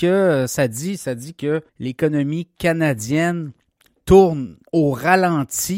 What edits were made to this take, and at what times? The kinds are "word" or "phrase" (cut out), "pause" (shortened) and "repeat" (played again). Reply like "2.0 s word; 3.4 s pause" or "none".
1.7 s pause; 4.7 s pause